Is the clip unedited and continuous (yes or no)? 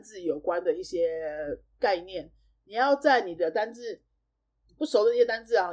yes